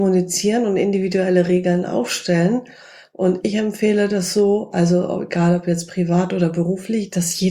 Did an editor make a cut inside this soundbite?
no; 0 cuts

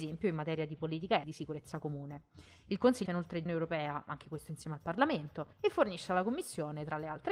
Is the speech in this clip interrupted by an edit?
yes; 4 cuts; at 1.2 s, 3.1 s, 3.5 s, 5.5 s

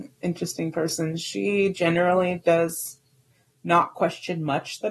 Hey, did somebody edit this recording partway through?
no; 0 cuts

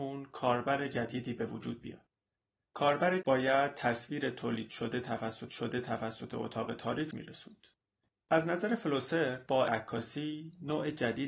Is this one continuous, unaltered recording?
no; 5 cuts; at 3.2 s, 5.5 s, 7.1 s, 8.1 s, 9.7 s

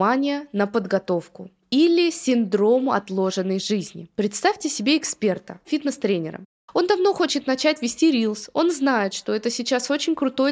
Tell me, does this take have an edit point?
yes; 2 cuts; at 4.1 s, 5.6 s

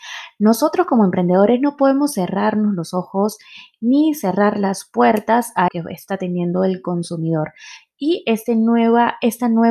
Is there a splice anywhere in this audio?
yes; 1 cut; at 5.7 s

